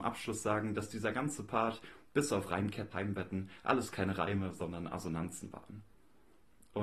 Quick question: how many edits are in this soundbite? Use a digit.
1